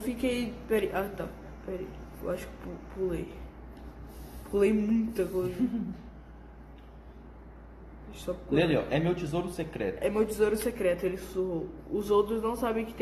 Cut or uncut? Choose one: uncut